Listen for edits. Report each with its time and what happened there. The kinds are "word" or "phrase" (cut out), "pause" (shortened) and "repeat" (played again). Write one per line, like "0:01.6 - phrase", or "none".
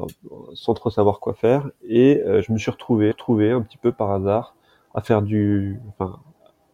0:03.1 - repeat